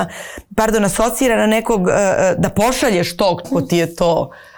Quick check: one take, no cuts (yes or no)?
no